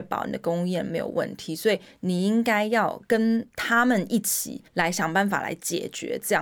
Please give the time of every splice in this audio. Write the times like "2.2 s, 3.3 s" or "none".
4.7 s